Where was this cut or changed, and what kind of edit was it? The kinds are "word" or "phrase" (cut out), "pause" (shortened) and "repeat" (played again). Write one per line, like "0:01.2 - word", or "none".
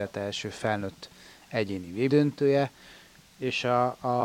0:02.1 - word